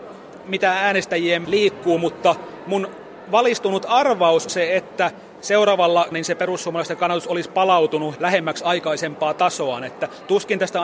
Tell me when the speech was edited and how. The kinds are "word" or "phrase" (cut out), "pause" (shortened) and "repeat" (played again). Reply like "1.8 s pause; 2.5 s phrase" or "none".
1.4 s word; 4.5 s word; 6.1 s word; 8.2 s word